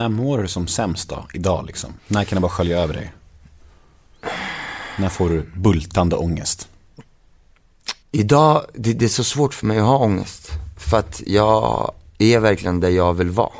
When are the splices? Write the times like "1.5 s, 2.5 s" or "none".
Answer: 2.0 s, 8.0 s